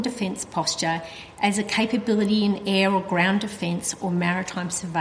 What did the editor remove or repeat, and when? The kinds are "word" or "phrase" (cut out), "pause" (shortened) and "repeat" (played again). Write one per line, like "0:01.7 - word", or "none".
none